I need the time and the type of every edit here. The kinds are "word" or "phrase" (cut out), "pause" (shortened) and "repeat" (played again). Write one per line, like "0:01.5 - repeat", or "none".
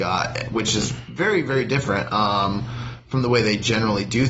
none